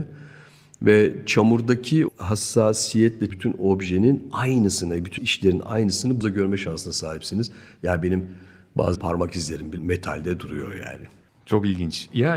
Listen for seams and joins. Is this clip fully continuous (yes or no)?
no